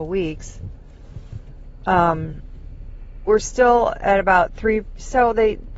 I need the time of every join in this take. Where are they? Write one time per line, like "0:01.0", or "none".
0:03.3